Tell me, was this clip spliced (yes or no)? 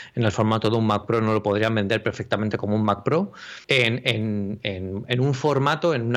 yes